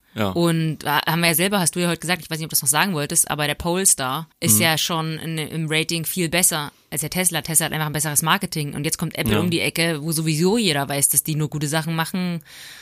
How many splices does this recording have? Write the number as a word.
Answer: one